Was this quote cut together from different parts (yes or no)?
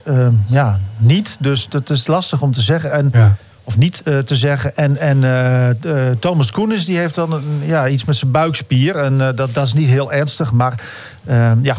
no